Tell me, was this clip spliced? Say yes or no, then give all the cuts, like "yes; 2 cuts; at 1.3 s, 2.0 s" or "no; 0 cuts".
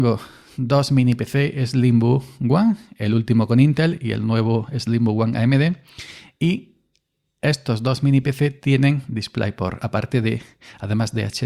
no; 0 cuts